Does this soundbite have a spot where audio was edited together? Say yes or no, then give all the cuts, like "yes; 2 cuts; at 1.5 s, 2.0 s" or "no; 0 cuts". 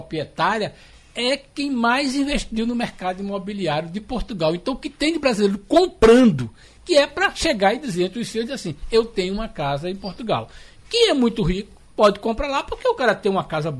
no; 0 cuts